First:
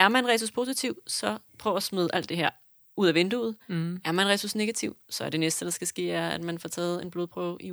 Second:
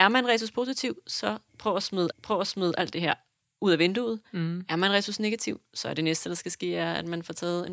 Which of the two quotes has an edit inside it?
second; 1 cut; at 2.1 s

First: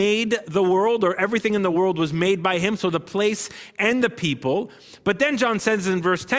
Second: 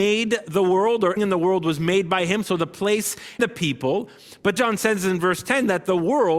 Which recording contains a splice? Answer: second; 3 cuts; at 1.2 s, 3.4 s, 4.6 s

